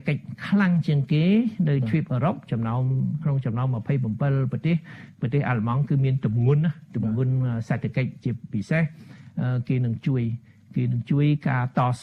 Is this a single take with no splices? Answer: yes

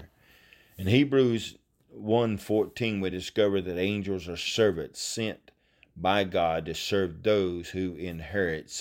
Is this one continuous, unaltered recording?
yes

